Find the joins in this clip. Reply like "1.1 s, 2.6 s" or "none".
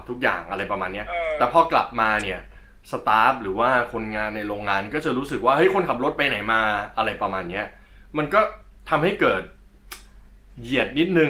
none